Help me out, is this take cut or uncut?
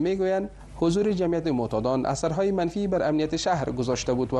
cut